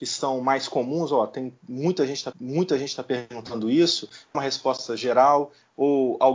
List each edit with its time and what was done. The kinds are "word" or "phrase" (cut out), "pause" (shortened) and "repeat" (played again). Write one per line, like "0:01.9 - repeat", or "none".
0:02.3 - repeat
0:04.3 - phrase